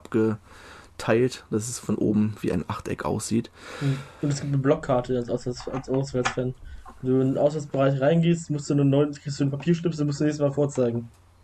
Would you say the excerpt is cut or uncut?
uncut